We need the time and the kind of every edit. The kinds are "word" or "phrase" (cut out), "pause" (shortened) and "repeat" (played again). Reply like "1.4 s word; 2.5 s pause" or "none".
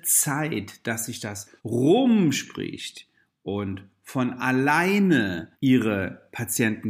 1.6 s pause; 5.5 s pause